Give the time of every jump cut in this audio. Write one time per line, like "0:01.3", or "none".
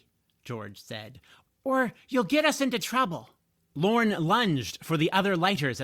none